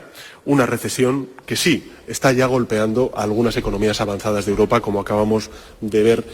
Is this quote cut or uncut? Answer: uncut